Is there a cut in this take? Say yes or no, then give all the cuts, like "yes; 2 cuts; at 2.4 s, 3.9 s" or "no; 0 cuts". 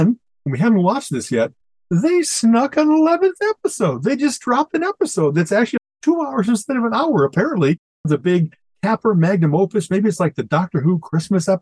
no; 0 cuts